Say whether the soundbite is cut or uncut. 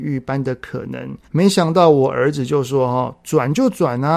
cut